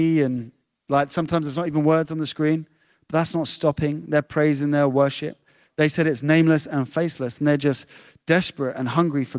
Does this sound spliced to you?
no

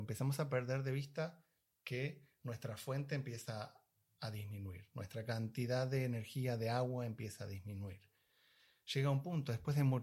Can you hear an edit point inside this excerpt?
no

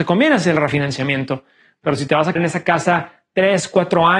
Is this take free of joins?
no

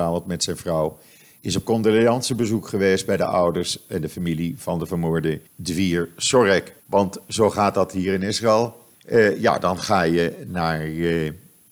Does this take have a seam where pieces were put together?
yes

